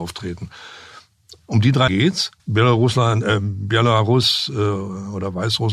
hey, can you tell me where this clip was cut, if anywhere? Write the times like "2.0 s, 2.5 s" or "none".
1.9 s, 2.4 s